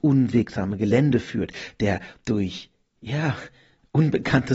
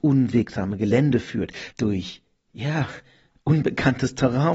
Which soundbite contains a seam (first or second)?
second